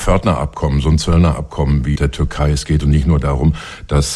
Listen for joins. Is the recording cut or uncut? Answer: cut